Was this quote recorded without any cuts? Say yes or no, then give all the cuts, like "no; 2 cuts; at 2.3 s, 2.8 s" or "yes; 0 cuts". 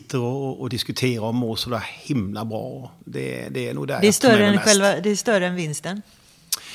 no; 1 cut; at 3.0 s